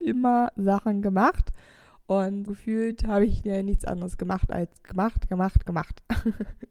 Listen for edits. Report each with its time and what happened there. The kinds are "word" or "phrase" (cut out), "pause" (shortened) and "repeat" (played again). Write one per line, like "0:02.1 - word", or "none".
0:02.5 - word